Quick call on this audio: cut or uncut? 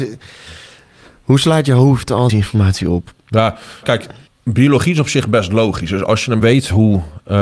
cut